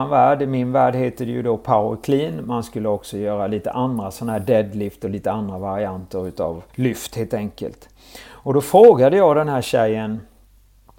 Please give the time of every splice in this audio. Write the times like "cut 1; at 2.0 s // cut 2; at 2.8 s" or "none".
cut 1; at 6.7 s